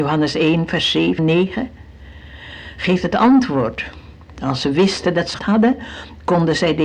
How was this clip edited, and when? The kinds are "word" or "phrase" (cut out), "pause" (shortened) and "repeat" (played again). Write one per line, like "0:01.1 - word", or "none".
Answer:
0:01.2 - word
0:05.4 - word